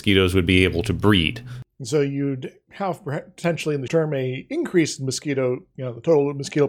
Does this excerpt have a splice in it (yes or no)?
yes